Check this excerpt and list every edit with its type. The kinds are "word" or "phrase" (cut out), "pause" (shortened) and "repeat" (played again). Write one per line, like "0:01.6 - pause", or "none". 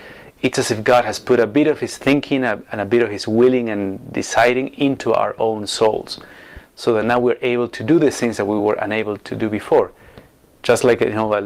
none